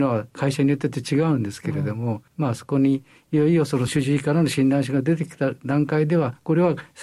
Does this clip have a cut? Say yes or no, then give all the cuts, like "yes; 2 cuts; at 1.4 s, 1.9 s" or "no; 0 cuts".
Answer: yes; 1 cut; at 2.3 s